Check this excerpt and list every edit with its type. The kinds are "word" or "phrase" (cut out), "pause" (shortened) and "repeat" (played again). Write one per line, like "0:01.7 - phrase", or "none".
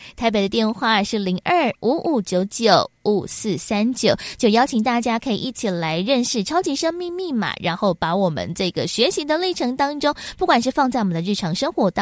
0:01.8 - pause